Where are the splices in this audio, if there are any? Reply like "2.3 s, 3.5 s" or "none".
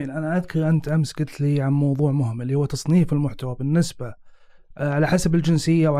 none